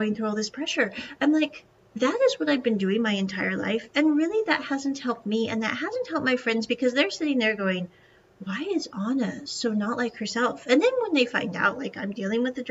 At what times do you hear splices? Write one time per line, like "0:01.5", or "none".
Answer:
0:01.8

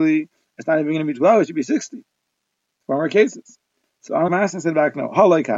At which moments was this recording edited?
0:04.3

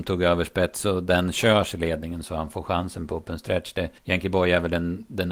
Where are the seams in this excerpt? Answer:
0:04.0

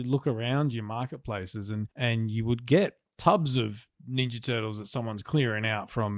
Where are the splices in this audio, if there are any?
0:01.9

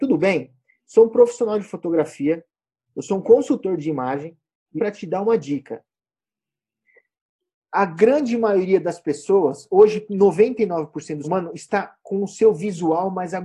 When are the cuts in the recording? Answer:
0:04.8
0:11.2

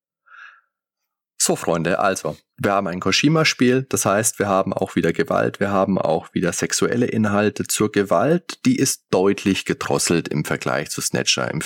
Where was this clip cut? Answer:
none

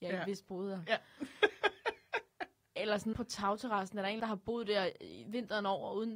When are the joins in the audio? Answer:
0:03.1
0:04.2

